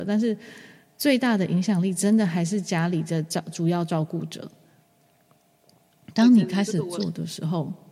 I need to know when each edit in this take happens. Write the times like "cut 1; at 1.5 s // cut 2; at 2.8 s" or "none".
none